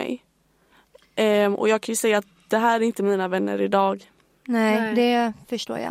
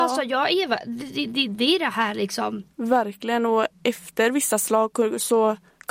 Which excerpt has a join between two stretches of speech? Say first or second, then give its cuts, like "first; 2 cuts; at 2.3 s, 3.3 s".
second; 1 cut; at 2.7 s